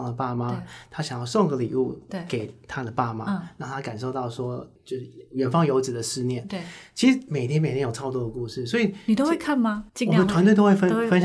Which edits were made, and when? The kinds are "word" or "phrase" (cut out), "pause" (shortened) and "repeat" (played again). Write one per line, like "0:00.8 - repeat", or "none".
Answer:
0:09.9 - pause